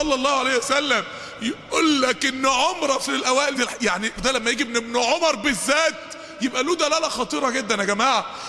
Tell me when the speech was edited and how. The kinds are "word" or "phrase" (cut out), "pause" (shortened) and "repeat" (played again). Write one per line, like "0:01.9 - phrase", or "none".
0:03.1 - word
0:03.5 - word
0:04.2 - word